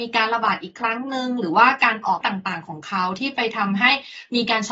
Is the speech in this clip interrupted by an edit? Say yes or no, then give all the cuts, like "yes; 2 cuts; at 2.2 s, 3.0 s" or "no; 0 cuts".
yes; 1 cut; at 2.2 s